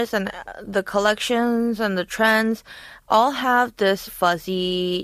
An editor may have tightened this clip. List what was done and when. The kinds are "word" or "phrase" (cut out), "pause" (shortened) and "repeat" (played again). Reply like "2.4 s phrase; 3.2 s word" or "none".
4.1 s word